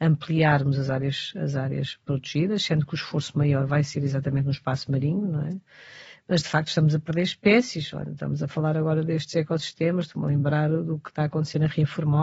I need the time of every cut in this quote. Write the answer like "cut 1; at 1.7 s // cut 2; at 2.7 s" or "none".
none